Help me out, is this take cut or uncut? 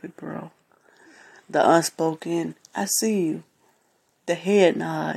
uncut